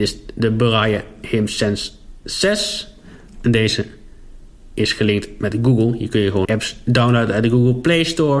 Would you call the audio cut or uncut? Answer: cut